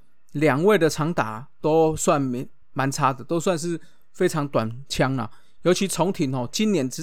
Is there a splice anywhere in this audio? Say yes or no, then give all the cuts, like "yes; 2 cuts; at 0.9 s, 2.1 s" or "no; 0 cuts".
yes; 1 cut; at 2.6 s